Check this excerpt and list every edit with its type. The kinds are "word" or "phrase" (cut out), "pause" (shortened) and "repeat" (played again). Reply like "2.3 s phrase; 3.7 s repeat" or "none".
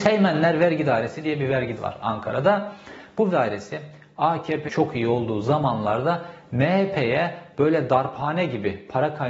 1.8 s word; 3.3 s word; 4.7 s phrase

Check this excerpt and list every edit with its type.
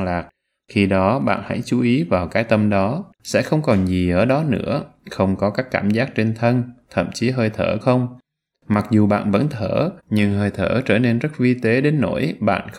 3.1 s pause; 7.8 s word; 10.0 s pause

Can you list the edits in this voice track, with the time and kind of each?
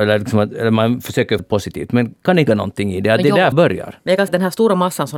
1.4 s word; 2.5 s word; 3.5 s word; 4.3 s word

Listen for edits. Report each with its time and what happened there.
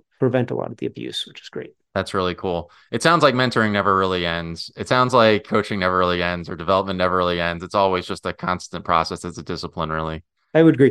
none

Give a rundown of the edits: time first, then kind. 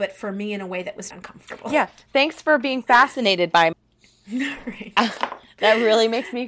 1.1 s word; 3.7 s word

